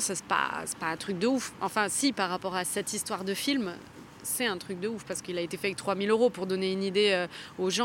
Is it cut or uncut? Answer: uncut